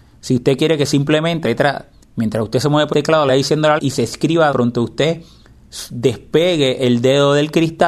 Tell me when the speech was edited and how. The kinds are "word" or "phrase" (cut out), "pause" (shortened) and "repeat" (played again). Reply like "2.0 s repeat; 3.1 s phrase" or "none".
1.4 s word; 2.9 s word; 3.3 s word; 3.8 s word; 4.5 s word